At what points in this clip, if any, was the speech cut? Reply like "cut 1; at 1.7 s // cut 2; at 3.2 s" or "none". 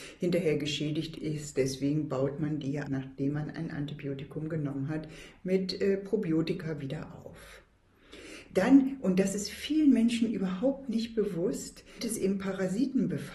cut 1; at 2.8 s // cut 2; at 12.0 s

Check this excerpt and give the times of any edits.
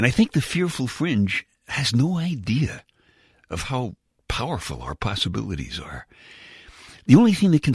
none

